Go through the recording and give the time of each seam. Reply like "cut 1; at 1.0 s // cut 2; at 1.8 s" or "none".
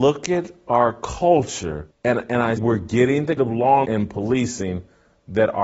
cut 1; at 1.9 s // cut 2; at 2.6 s // cut 3; at 3.4 s // cut 4; at 3.8 s